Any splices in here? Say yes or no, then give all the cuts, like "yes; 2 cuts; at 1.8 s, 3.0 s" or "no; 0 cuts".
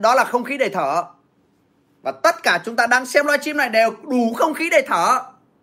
no; 0 cuts